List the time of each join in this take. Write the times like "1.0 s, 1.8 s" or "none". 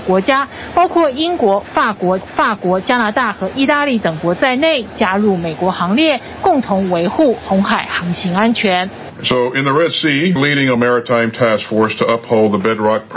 2.2 s, 10.4 s, 10.8 s